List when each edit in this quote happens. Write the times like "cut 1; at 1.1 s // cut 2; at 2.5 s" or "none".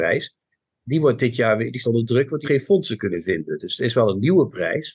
cut 1; at 1.8 s // cut 2; at 2.4 s